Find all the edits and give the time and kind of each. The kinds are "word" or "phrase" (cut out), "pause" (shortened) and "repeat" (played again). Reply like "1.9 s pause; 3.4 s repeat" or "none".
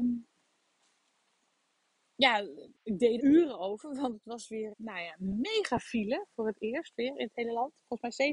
2.7 s pause; 3.2 s word; 4.7 s word